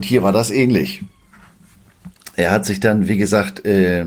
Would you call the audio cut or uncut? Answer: uncut